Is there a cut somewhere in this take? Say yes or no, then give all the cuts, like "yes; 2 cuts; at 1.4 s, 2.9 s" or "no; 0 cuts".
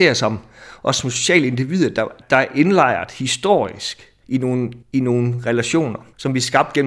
yes; 2 cuts; at 2.2 s, 4.8 s